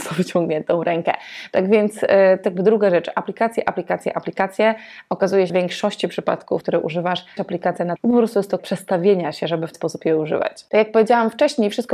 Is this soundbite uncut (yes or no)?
no